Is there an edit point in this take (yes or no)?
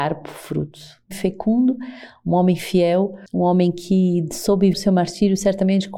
yes